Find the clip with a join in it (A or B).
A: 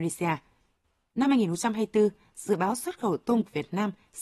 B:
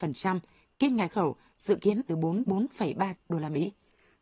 B